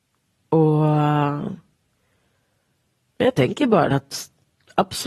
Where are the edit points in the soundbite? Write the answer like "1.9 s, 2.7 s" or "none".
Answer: 3.9 s